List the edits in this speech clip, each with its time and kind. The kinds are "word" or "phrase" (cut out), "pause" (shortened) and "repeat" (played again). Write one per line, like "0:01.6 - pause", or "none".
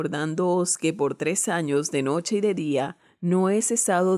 none